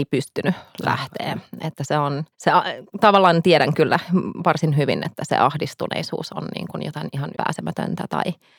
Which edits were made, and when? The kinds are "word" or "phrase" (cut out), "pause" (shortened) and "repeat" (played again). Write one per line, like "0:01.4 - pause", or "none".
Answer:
0:02.3 - pause
0:07.3 - word